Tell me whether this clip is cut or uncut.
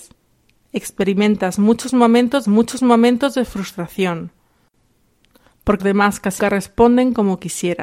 cut